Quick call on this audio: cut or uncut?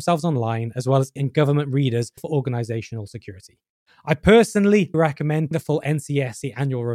cut